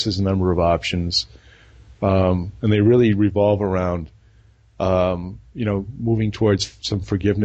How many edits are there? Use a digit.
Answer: 1